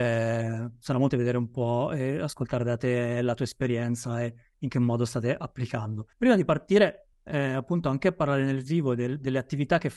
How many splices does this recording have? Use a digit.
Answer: 3